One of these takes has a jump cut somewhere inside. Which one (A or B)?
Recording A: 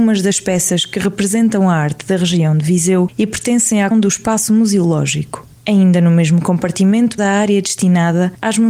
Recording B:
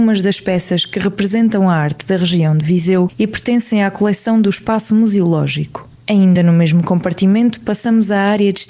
A